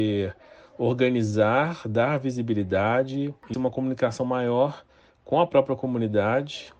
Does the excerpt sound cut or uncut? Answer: cut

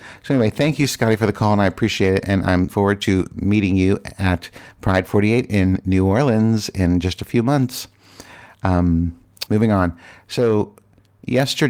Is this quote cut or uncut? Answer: cut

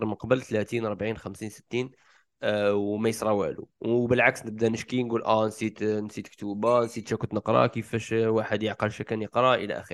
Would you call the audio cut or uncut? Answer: cut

